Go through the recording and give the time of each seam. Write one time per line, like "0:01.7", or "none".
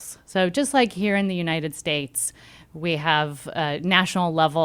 none